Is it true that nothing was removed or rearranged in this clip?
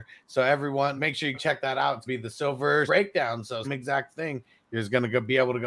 no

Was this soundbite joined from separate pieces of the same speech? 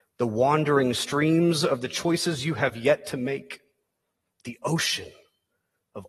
no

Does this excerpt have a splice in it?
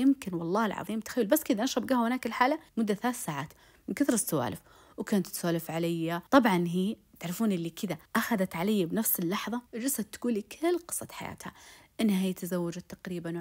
yes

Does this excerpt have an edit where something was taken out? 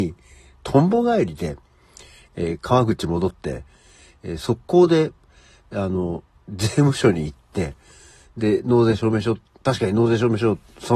no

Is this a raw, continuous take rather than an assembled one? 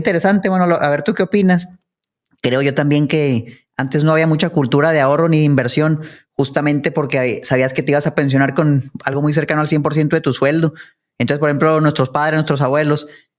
yes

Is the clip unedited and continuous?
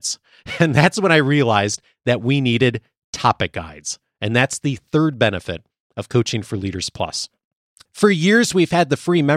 yes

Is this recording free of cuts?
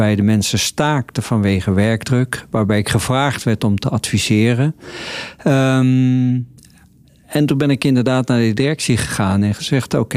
yes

